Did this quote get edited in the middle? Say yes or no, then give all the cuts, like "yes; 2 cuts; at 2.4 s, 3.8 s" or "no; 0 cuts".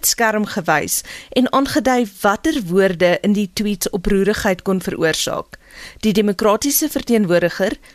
no; 0 cuts